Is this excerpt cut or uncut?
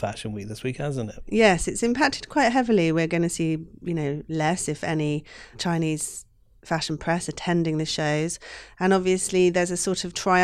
uncut